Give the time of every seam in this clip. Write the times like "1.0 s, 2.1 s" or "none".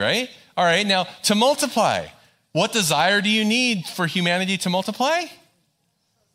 none